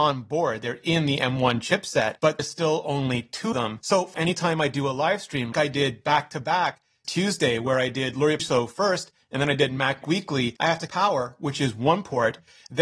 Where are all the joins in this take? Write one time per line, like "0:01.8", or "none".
0:02.4
0:03.5
0:04.1
0:05.5
0:07.0
0:08.4
0:10.0
0:10.9